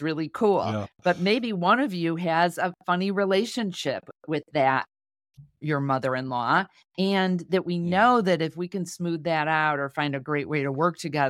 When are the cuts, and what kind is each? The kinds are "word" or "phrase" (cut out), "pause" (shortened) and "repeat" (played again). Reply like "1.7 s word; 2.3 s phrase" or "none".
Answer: none

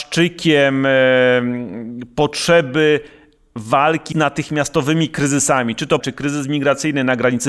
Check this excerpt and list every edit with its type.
4.1 s word; 6.0 s word

